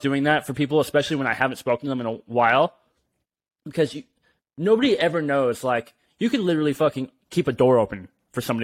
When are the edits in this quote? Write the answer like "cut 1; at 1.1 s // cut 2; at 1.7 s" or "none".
none